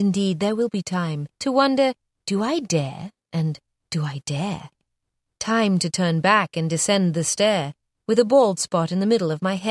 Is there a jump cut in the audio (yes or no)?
no